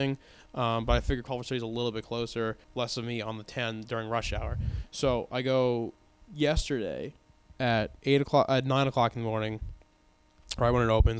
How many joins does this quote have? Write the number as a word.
three